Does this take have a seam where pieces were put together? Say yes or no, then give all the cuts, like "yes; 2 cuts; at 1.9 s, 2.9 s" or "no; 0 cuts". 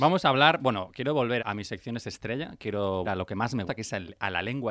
yes; 3 cuts; at 1.4 s, 3.0 s, 3.7 s